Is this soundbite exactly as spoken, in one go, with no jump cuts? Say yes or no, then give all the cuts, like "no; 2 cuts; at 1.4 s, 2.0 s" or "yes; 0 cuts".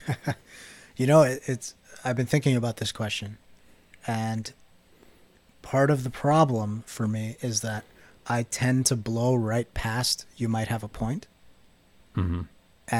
yes; 0 cuts